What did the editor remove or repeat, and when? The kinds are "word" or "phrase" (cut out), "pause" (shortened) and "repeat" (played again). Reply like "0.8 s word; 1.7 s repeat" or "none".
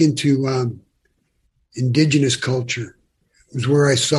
none

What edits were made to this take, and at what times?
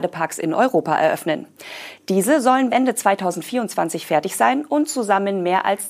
2.7 s word

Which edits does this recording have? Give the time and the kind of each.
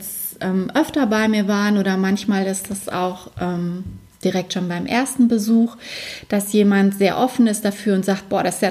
none

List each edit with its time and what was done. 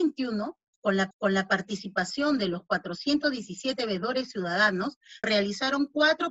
1.1 s repeat; 5.2 s word

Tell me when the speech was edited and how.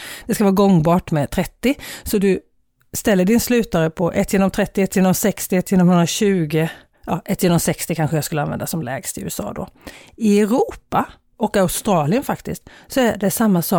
none

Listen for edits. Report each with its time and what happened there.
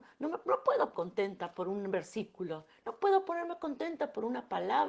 0.9 s word

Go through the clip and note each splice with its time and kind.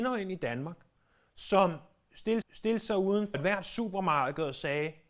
2.4 s repeat; 3.3 s word

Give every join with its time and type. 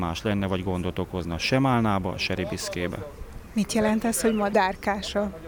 none

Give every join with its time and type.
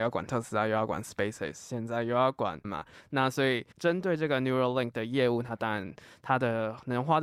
2.6 s word; 3.7 s pause

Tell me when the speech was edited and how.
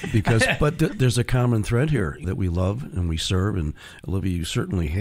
2.2 s word

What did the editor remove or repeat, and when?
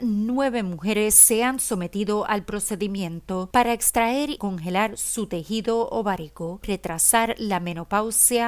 4.4 s word; 6.6 s phrase

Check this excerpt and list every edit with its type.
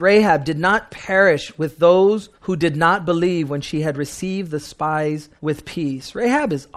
2.3 s pause; 5.4 s pause

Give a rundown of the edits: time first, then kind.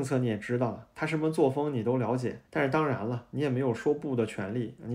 2.5 s pause

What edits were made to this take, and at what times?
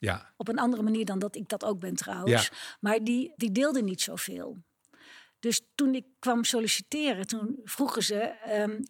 3.4 s word

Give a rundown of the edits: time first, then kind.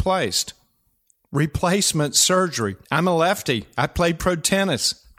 2.8 s pause

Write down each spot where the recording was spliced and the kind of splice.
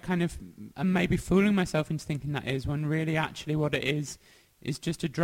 none

